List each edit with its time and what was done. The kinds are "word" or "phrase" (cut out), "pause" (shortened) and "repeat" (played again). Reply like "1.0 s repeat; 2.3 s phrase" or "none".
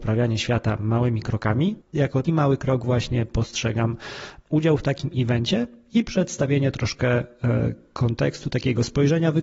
1.8 s word; 2.2 s word